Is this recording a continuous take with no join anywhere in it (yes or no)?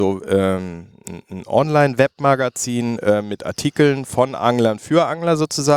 yes